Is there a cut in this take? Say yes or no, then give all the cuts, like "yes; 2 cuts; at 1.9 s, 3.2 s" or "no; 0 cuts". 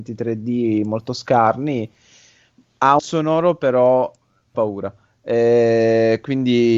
yes; 2 cuts; at 3.0 s, 4.5 s